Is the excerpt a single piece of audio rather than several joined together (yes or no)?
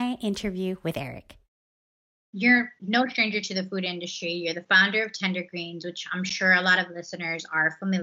yes